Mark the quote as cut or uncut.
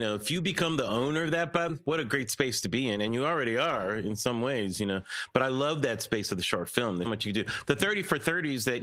cut